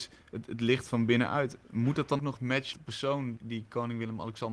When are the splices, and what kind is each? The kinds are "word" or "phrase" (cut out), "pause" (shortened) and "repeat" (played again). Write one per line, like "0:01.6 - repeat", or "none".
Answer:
0:02.2 - word
0:02.7 - word
0:03.4 - word